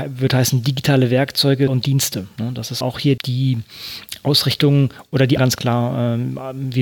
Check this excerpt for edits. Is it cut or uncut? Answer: cut